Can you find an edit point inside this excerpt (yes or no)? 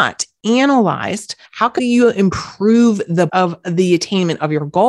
yes